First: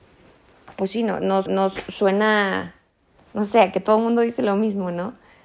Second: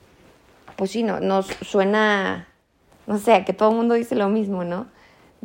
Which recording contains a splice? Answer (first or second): first